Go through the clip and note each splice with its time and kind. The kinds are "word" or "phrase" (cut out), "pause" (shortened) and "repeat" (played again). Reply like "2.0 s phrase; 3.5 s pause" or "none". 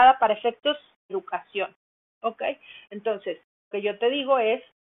1.1 s word; 3.7 s word